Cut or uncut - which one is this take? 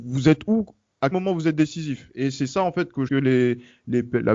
cut